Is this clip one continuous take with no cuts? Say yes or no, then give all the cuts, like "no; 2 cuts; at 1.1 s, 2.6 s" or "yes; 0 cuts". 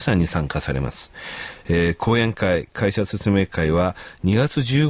no; 1 cut; at 1.6 s